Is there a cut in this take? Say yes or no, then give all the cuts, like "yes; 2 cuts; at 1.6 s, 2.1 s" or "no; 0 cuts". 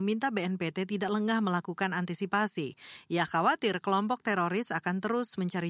no; 0 cuts